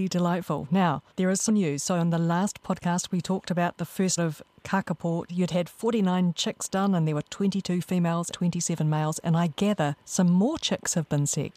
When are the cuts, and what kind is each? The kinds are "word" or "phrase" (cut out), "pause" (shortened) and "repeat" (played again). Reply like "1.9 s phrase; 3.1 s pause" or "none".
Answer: 1.1 s pause; 1.5 s word; 4.2 s word; 5.3 s phrase; 8.3 s word